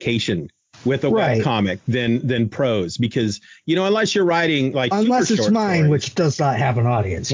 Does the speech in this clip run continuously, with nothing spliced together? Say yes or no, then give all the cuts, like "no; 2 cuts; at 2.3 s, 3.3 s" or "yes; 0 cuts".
yes; 0 cuts